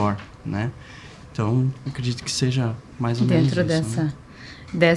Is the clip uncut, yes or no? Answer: yes